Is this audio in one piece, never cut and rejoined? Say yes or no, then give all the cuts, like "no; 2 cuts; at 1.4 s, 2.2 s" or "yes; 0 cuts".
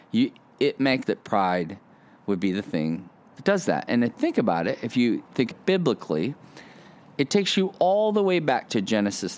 no; 3 cuts; at 1.0 s, 4.1 s, 5.5 s